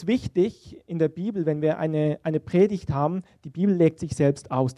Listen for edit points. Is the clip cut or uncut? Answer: uncut